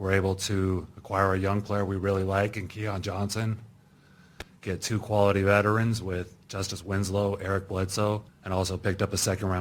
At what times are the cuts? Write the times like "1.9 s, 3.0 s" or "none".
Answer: 8.3 s